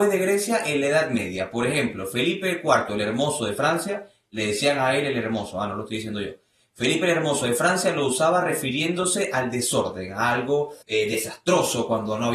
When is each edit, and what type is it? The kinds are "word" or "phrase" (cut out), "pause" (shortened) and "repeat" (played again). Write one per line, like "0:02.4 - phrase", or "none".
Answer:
0:10.8 - pause

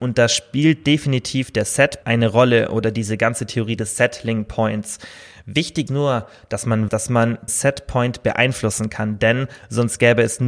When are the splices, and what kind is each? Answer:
0:02.0 - word
0:05.9 - word
0:06.9 - word
0:07.5 - word

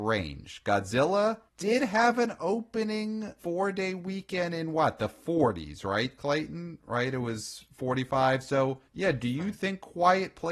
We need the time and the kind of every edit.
0:01.5 - pause
0:03.4 - pause
0:08.9 - pause

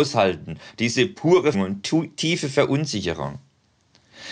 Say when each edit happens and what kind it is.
0:01.5 - word

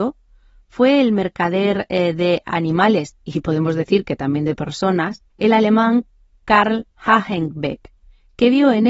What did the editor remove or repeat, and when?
0:05.3 - pause
0:06.9 - pause

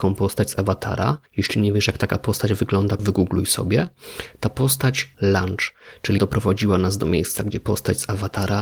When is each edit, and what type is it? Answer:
0:01.3 - pause
0:03.0 - word
0:05.1 - word
0:06.2 - word

